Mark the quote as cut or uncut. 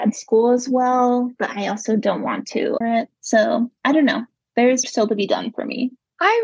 cut